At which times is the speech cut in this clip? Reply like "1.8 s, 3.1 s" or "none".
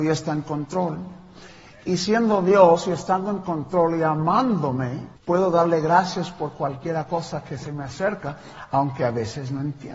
5.2 s